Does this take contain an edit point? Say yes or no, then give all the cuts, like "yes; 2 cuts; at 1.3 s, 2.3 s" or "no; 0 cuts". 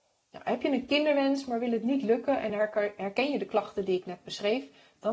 no; 0 cuts